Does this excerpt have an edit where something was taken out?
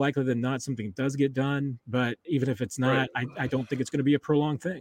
no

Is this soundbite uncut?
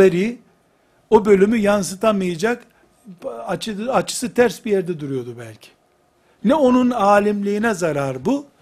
yes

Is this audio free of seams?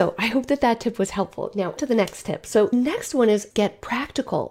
no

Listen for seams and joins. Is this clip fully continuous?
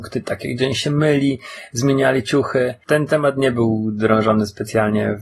yes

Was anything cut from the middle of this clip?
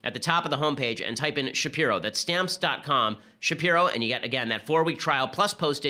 no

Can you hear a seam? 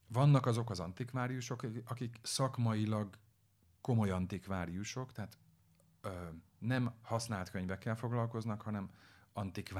no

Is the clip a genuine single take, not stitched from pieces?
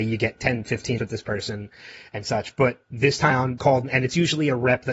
no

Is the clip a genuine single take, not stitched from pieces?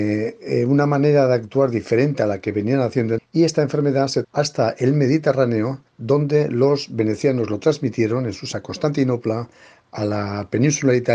no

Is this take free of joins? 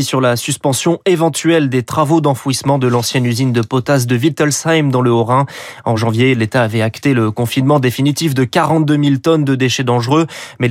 yes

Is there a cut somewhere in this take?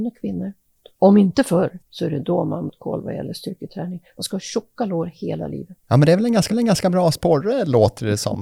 yes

